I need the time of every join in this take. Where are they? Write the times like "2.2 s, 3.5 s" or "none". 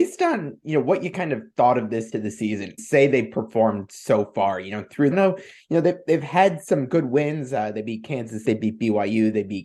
2.1 s, 2.8 s, 5.1 s, 8.4 s